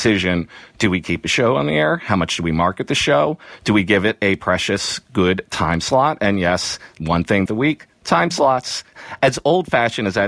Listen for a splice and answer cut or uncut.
cut